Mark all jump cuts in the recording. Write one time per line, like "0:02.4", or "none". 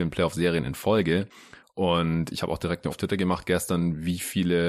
0:02.3
0:02.9